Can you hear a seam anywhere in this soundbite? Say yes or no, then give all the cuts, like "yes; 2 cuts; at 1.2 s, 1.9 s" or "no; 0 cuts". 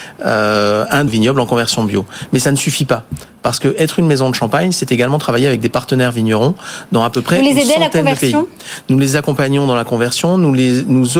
yes; 1 cut; at 1.1 s